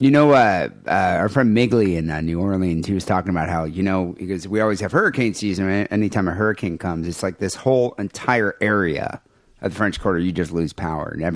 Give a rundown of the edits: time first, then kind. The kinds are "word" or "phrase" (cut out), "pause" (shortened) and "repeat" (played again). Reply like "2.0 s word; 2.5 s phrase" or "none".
none